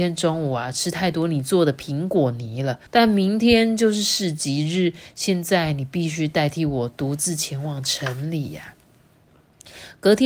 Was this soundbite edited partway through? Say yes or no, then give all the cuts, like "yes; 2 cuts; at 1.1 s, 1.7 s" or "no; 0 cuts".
yes; 1 cut; at 2.9 s